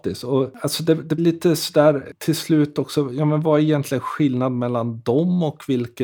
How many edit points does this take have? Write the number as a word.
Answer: one